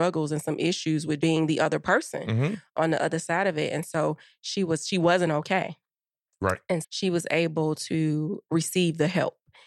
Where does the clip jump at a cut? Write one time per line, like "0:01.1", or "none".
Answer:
0:01.2
0:06.8